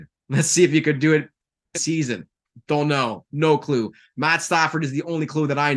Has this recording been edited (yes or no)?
yes